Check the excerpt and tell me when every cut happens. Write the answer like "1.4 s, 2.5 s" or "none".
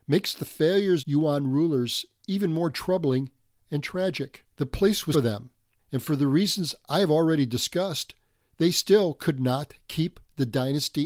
1.0 s, 3.6 s, 4.5 s, 5.1 s